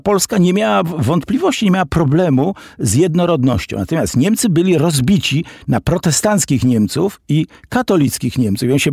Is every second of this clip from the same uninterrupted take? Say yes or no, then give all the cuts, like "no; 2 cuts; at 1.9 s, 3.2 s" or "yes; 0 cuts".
yes; 0 cuts